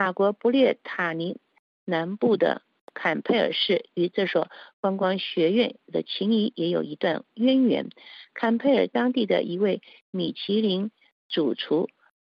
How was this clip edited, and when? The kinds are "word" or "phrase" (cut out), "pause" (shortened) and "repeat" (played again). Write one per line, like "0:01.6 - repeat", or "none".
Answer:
0:04.7 - pause